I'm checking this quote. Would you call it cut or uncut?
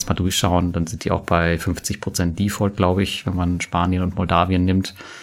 uncut